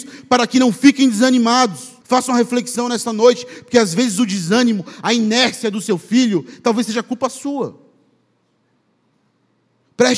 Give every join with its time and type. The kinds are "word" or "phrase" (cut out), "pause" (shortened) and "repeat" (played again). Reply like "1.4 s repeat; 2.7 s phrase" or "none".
2.0 s pause